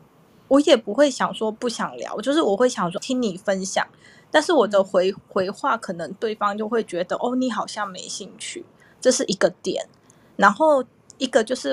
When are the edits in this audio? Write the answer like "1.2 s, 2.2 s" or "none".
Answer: 3.0 s